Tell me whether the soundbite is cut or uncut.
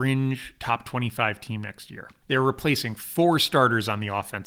cut